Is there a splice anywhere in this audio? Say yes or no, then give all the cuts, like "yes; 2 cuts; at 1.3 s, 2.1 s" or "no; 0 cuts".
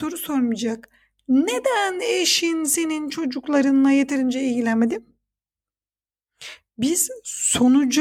no; 0 cuts